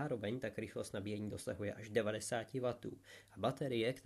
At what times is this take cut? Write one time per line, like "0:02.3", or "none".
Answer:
none